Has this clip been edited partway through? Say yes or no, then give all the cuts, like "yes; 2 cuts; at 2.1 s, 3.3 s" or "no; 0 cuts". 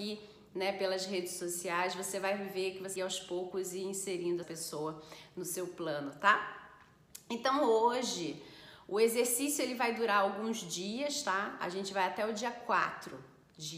yes; 2 cuts; at 3.0 s, 4.4 s